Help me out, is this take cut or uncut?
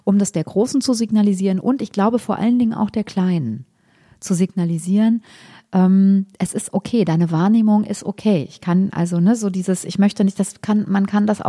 uncut